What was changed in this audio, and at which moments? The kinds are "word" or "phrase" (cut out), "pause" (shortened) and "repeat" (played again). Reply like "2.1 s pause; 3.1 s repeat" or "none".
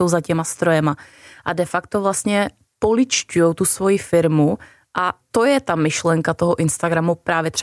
5.3 s word